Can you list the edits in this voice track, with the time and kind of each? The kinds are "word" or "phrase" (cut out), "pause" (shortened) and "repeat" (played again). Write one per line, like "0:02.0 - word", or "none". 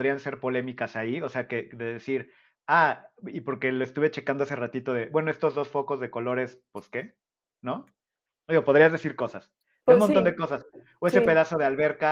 none